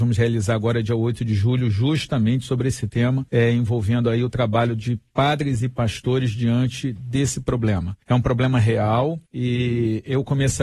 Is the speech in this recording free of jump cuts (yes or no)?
no